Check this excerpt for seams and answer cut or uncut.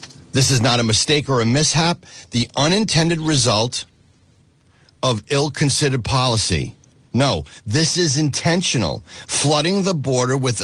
uncut